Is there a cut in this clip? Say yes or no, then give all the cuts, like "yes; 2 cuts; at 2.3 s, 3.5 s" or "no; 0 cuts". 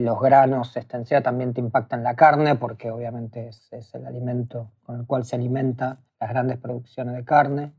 yes; 1 cut; at 6.1 s